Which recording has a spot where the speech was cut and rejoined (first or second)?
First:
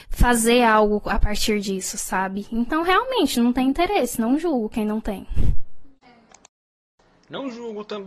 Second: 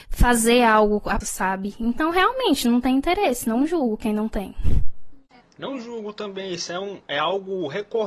second